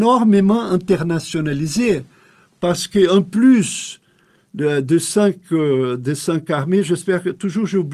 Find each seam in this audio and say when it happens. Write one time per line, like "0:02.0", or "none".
none